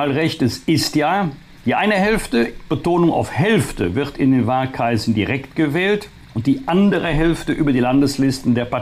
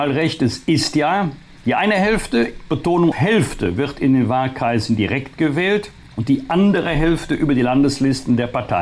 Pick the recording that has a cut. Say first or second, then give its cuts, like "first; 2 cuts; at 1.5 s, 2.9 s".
second; 1 cut; at 3.1 s